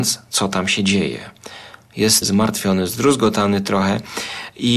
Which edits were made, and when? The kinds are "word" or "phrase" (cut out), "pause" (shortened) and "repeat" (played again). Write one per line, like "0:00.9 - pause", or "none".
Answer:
0:02.2 - word